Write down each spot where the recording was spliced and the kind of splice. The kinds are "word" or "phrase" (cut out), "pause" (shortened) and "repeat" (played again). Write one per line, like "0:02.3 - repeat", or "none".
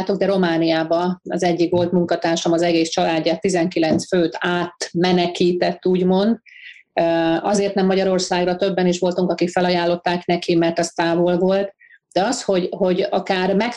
none